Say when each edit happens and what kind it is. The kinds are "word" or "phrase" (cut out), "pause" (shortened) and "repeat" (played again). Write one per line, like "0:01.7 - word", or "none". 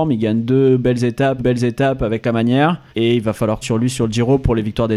0:01.4 - repeat
0:02.9 - pause
0:03.6 - word